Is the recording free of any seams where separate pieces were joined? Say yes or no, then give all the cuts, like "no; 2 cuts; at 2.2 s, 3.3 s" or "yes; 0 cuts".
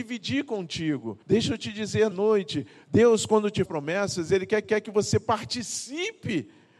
no; 4 cuts; at 1.2 s, 2.1 s, 3.7 s, 4.6 s